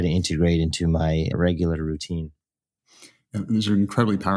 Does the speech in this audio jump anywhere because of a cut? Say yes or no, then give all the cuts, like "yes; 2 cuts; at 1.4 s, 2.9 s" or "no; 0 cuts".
yes; 1 cut; at 1.3 s